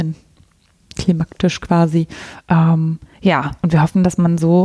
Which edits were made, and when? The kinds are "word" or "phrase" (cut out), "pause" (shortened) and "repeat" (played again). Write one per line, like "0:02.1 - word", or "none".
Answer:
0:03.1 - pause